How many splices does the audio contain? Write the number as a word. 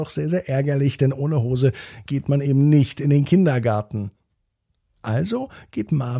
zero